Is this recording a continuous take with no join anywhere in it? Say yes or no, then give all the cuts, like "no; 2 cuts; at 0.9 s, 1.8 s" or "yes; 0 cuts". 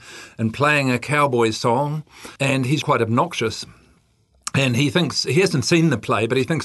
no; 2 cuts; at 2.4 s, 2.8 s